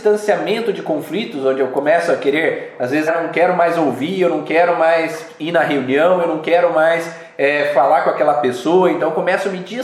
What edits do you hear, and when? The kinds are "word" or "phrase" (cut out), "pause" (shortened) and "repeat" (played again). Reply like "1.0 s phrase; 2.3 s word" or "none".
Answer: 3.1 s word